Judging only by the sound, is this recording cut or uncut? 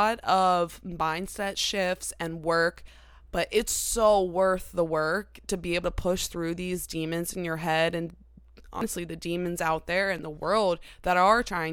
uncut